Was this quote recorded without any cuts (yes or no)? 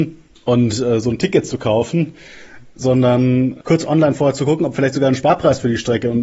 yes